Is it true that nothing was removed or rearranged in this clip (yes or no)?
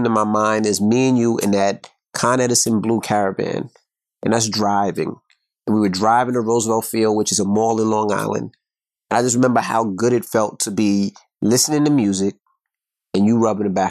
yes